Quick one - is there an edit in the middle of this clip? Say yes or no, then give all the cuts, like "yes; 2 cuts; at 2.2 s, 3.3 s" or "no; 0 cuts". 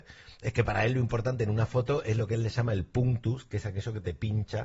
no; 0 cuts